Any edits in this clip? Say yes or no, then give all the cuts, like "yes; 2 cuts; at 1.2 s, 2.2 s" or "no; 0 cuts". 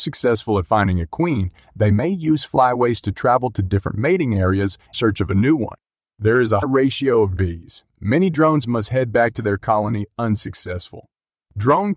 yes; 5 cuts; at 4.9 s, 6.0 s, 6.6 s, 7.4 s, 7.9 s